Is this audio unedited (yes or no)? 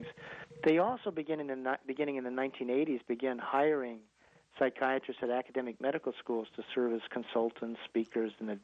yes